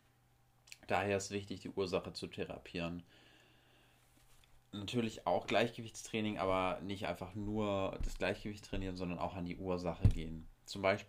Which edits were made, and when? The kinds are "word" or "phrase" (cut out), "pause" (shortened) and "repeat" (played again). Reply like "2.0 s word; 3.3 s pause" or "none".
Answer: none